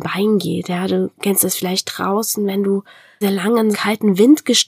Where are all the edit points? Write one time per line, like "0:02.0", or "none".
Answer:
0:03.2
0:03.7